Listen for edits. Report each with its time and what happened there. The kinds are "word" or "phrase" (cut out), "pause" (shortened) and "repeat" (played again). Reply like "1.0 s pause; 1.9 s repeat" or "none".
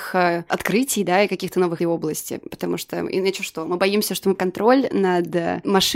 1.8 s phrase; 4.4 s word

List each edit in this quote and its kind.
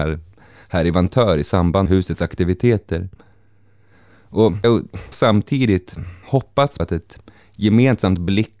1.9 s word; 4.6 s word; 5.1 s word; 6.8 s word

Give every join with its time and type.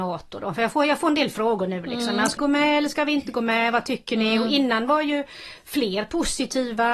2.4 s word

